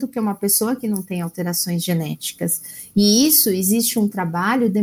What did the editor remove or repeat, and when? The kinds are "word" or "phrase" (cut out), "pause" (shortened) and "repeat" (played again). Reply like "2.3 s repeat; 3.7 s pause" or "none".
none

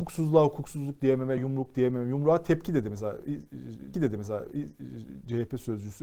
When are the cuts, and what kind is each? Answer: 1.4 s word; 3.9 s repeat

